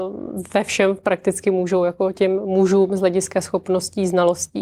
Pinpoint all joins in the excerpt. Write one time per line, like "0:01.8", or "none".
none